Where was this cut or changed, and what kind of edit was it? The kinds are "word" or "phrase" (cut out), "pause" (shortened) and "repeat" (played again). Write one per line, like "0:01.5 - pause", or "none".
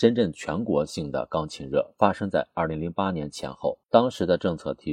0:03.8 - pause